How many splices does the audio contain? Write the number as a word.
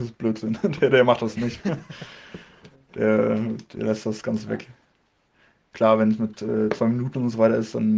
zero